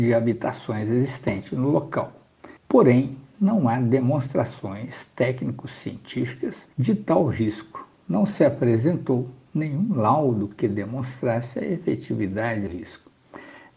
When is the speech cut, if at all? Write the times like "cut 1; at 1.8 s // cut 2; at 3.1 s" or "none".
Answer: cut 1; at 2.6 s // cut 2; at 6.7 s // cut 3; at 12.7 s